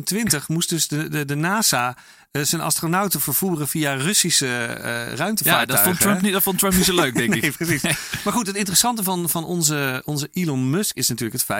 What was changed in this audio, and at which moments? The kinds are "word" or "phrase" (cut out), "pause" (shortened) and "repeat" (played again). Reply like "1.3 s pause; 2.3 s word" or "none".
none